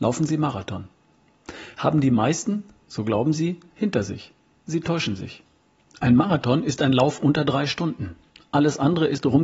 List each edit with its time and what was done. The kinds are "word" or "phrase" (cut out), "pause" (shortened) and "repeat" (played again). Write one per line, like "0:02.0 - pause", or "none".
none